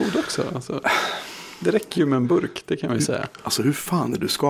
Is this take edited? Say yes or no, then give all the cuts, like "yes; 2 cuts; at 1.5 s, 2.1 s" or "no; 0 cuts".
no; 0 cuts